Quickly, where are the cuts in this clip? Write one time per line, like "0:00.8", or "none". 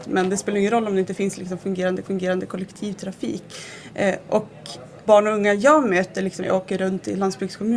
0:02.0
0:05.1
0:06.4